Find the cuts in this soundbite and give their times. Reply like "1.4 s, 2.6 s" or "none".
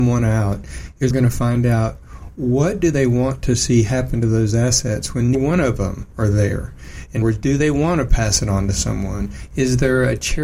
1.1 s, 5.3 s, 7.2 s